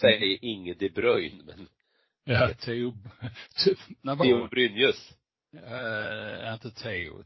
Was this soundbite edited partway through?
yes; 2 cuts; at 2.6 s, 4.2 s

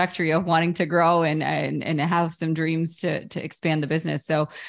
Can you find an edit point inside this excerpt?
no; 0 cuts

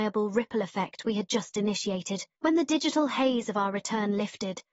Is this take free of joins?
no; 1 cut; at 2.4 s

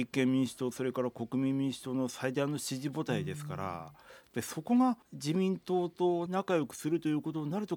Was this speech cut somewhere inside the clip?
yes; 2 cuts; at 5.0 s, 6.3 s

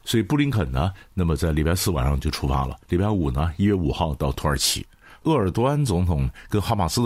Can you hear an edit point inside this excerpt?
yes; 2 cuts; at 2.8 s, 5.0 s

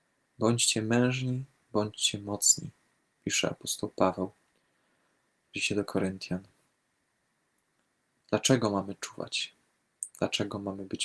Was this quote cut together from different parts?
no; 0 cuts

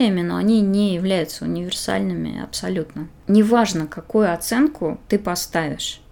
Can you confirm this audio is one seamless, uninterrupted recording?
no; 1 cut; at 5.0 s

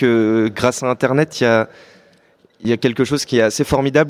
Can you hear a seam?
no; 0 cuts

